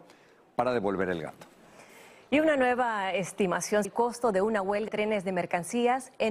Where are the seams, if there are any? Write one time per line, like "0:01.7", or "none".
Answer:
0:03.8
0:04.9